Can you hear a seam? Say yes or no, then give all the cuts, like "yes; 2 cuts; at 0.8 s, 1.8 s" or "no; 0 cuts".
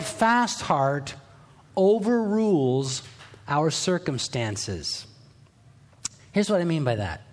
no; 0 cuts